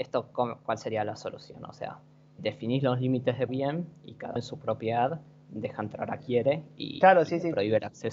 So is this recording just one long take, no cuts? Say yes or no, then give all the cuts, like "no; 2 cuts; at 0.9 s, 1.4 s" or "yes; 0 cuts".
no; 4 cuts; at 2.4 s, 3.5 s, 4.4 s, 6.2 s